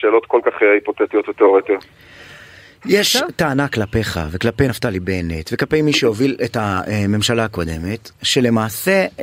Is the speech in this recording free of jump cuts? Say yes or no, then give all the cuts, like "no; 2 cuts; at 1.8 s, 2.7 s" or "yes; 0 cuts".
yes; 0 cuts